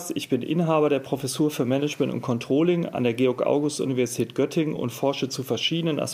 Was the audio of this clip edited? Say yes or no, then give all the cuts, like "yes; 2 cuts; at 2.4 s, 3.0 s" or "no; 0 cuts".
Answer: no; 0 cuts